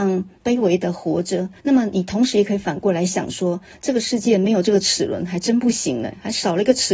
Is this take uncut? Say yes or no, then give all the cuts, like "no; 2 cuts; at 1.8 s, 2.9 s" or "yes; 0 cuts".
no; 1 cut; at 1.6 s